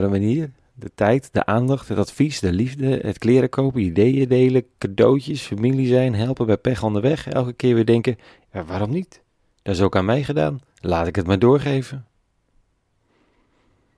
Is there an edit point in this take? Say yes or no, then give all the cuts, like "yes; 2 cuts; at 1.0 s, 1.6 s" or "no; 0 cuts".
no; 0 cuts